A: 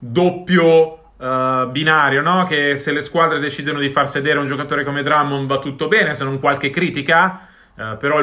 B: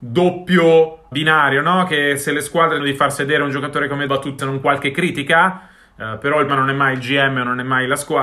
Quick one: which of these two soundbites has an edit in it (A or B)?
B